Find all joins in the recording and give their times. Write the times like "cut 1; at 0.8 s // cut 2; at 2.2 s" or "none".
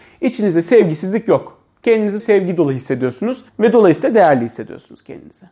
cut 1; at 2.2 s // cut 2; at 3.5 s